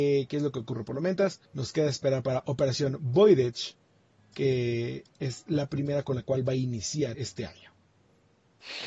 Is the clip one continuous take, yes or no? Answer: no